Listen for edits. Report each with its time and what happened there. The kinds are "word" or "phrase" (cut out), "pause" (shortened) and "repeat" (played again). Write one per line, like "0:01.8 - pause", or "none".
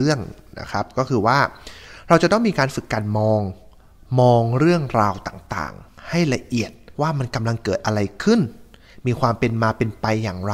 0:06.9 - pause